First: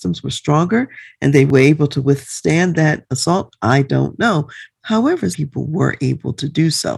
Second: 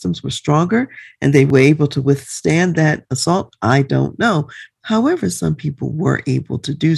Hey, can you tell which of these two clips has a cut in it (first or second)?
first